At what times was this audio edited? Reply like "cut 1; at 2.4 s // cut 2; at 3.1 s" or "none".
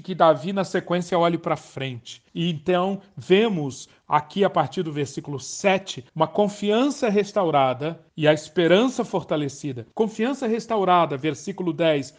cut 1; at 2.3 s // cut 2; at 6.1 s // cut 3; at 8.1 s // cut 4; at 9.9 s